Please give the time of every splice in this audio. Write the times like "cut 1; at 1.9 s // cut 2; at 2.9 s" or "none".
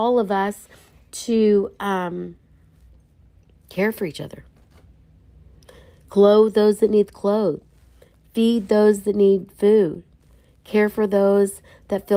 none